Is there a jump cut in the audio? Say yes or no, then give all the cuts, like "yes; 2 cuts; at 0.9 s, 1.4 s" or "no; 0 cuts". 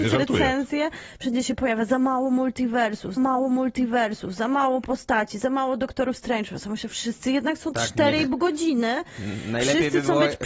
yes; 1 cut; at 3.2 s